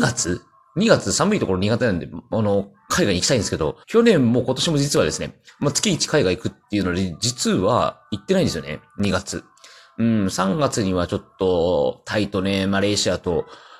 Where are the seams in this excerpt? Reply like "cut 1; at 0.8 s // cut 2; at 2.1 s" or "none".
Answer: cut 1; at 3.8 s